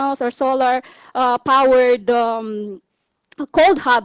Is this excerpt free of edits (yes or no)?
yes